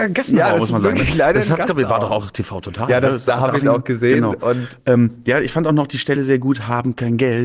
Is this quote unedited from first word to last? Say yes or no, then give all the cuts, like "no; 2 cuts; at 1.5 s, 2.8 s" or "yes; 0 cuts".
yes; 0 cuts